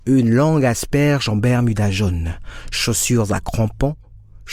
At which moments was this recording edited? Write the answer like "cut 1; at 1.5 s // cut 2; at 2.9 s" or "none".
none